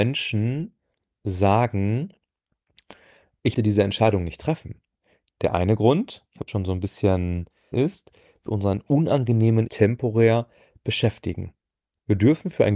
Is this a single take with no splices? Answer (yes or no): no